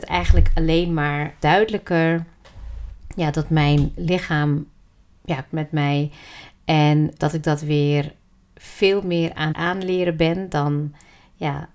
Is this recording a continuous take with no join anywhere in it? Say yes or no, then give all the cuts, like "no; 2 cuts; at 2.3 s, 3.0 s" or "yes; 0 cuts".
no; 4 cuts; at 1.4 s, 5.5 s, 7.2 s, 9.5 s